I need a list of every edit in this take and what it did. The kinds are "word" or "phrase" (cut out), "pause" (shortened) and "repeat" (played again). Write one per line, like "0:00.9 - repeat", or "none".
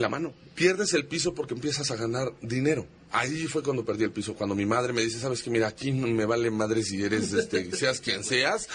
none